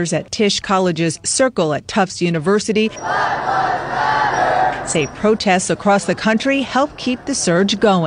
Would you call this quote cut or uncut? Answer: uncut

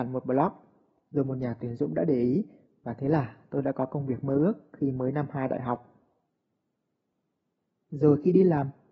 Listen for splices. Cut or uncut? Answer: uncut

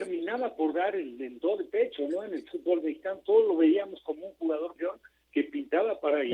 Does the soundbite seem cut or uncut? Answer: cut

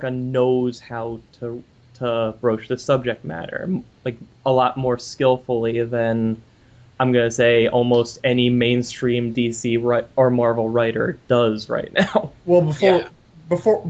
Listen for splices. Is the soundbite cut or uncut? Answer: uncut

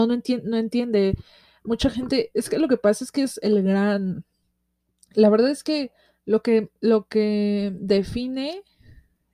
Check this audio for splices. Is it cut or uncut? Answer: uncut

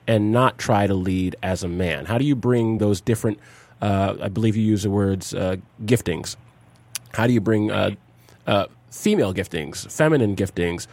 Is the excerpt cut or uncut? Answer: uncut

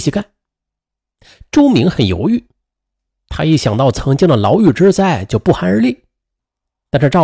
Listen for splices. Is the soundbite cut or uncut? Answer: uncut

